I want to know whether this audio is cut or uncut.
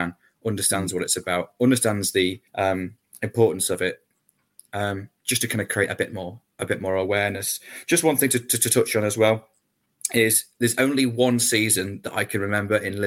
cut